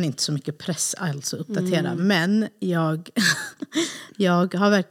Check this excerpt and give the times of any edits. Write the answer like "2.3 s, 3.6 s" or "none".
none

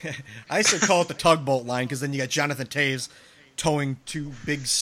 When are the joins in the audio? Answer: none

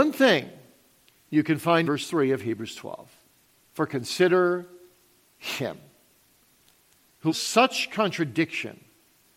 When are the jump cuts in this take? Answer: 1.8 s, 7.3 s

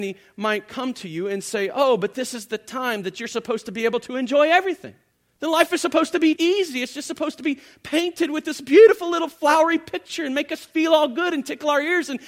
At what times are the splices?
5.1 s, 6.4 s

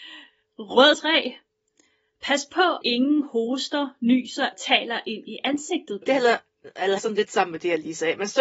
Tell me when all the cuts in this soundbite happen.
0.9 s, 2.8 s, 4.5 s, 6.0 s, 7.0 s

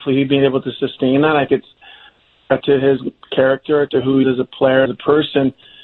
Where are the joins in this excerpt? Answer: 1.5 s, 2.6 s, 3.9 s, 4.2 s, 4.9 s

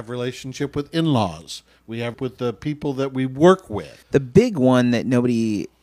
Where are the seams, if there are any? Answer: 2.1 s, 4.0 s

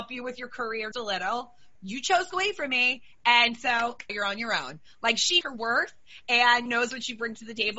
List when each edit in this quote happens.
0.9 s, 1.8 s, 2.3 s, 4.1 s, 5.4 s, 6.7 s

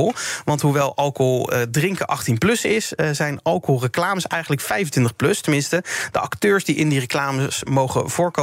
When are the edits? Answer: none

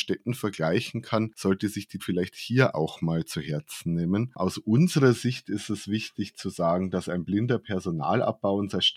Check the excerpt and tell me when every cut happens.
2.0 s

